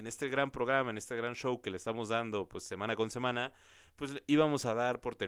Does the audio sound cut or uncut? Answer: uncut